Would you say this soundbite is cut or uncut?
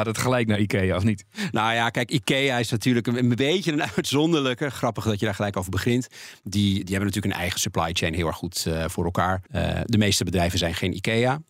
cut